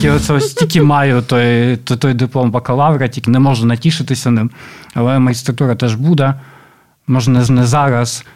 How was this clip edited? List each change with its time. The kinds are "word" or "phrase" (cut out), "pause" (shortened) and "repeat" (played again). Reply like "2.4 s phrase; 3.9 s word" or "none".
3.2 s word; 7.5 s repeat